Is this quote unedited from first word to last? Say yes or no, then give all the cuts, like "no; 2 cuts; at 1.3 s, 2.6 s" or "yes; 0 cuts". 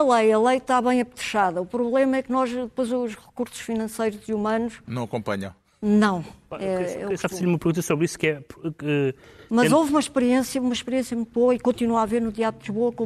yes; 0 cuts